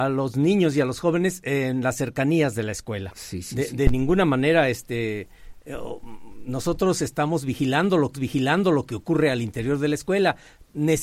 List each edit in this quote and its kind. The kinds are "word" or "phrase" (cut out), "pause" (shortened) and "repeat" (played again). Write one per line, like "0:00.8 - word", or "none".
0:08.1 - repeat